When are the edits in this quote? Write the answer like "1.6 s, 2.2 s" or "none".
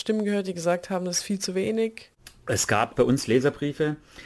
2.9 s